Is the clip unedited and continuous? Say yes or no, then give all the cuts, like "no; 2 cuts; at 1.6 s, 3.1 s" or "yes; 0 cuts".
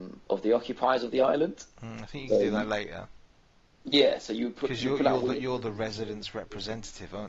yes; 0 cuts